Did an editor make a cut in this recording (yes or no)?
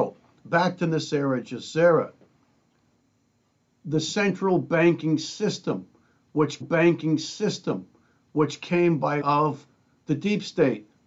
yes